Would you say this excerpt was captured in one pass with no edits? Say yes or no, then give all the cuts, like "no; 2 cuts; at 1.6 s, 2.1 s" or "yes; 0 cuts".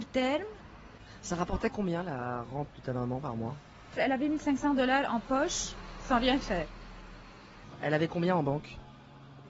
yes; 0 cuts